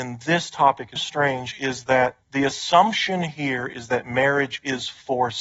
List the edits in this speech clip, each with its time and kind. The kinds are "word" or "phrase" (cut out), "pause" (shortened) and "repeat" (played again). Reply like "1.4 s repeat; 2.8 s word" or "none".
1.0 s word; 2.2 s pause

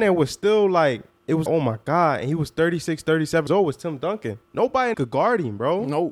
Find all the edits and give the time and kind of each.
1.5 s word; 3.5 s word; 4.4 s pause; 4.9 s phrase

